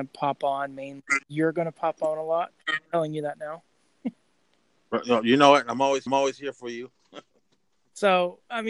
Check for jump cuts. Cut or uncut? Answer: cut